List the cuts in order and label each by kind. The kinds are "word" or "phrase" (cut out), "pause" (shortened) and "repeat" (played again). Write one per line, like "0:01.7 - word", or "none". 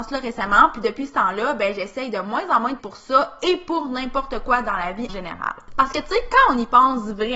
0:02.8 - word
0:05.1 - word